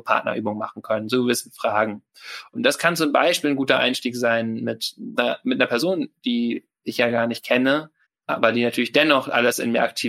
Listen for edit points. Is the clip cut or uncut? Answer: cut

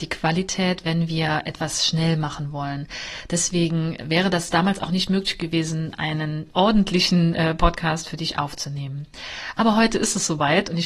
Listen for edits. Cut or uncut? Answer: uncut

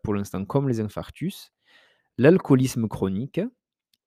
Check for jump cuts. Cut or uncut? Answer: uncut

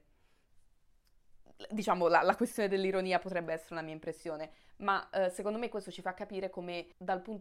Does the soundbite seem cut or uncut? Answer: uncut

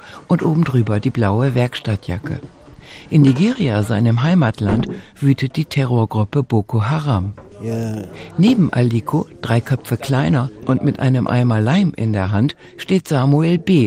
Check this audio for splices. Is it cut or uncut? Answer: uncut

